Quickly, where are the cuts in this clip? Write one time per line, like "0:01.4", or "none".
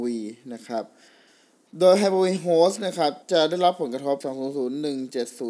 0:03.2
0:04.2